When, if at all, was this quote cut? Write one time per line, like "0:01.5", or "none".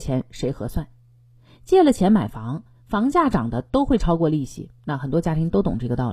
0:04.8